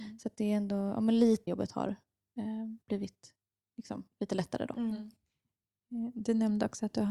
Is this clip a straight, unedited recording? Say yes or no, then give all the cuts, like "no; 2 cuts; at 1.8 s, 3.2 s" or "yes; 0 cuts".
no; 2 cuts; at 1.5 s, 2.8 s